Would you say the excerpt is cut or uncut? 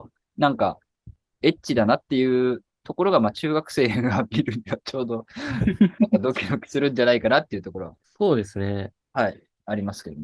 cut